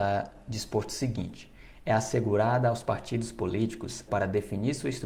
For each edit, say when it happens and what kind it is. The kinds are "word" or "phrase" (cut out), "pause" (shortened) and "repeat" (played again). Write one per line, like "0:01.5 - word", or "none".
0:04.1 - word